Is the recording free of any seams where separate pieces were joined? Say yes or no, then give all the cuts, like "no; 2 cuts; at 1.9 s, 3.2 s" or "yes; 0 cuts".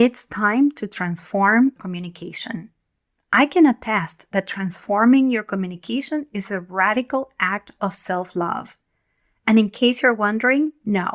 no; 1 cut; at 1.8 s